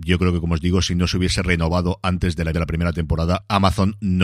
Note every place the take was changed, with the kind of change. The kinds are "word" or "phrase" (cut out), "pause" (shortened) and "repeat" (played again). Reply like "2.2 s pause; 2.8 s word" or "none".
2.5 s word